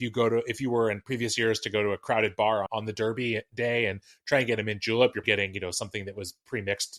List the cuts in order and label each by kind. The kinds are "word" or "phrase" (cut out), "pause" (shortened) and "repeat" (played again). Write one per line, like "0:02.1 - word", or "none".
0:02.7 - word
0:05.2 - word